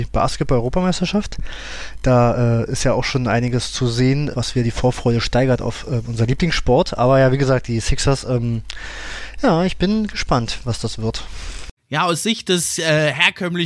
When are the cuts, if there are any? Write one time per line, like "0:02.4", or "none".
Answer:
0:04.3
0:09.8
0:11.8